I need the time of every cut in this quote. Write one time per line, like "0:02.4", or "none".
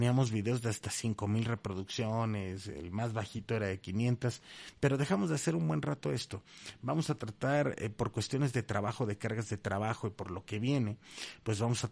none